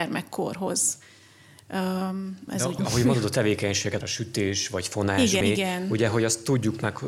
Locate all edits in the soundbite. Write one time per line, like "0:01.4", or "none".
0:02.5
0:02.8
0:04.0
0:05.4

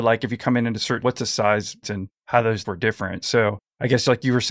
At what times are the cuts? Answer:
0:01.0
0:01.8
0:02.6

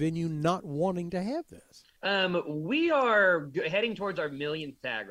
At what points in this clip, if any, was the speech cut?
0:02.0

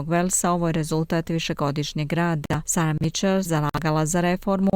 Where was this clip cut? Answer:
0:02.6
0:03.4

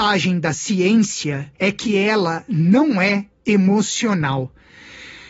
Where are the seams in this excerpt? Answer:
0:01.6

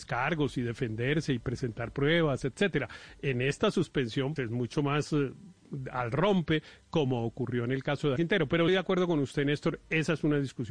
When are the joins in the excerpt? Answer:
0:04.4
0:08.2
0:08.7

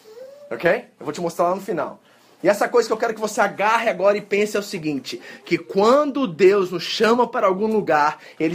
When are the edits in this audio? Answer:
none

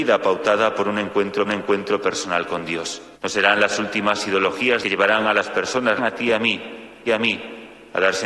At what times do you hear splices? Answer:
0:01.4
0:03.1
0:04.8
0:06.0
0:07.1

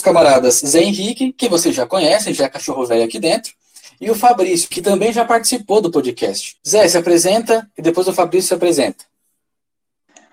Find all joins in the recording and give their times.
0:06.6

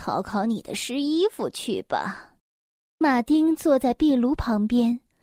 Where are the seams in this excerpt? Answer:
0:02.4

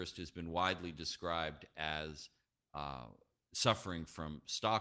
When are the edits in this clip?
none

